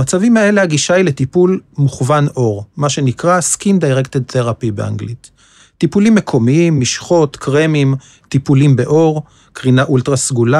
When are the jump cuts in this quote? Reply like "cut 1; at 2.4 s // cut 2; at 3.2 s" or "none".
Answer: none